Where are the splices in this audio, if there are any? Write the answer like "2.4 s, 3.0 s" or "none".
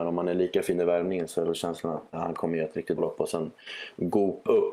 2.1 s, 3.0 s